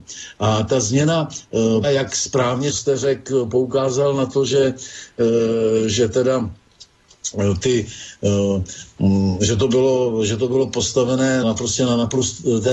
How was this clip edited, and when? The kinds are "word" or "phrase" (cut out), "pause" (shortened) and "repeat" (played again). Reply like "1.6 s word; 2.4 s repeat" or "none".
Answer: 1.8 s word; 2.7 s word; 11.4 s word